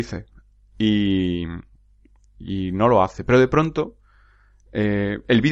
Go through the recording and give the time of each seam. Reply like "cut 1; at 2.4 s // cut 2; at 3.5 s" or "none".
none